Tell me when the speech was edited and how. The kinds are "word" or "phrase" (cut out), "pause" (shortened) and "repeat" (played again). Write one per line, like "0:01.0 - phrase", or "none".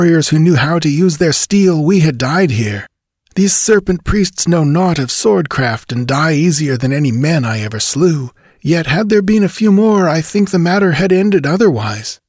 none

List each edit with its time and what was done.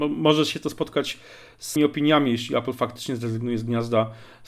0:01.8 - word

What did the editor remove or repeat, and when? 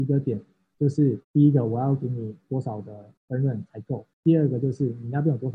0:01.2 - pause
0:03.2 - pause
0:04.1 - pause

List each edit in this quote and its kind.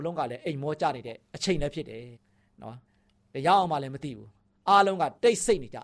0:02.1 - pause
0:02.9 - pause

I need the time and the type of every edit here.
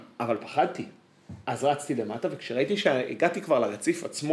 0:01.4 - pause

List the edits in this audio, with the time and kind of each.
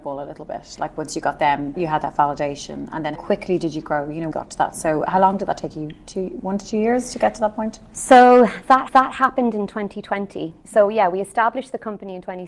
0:01.7 - word
0:03.1 - word
0:04.3 - phrase
0:05.1 - word
0:08.9 - repeat
0:10.6 - pause

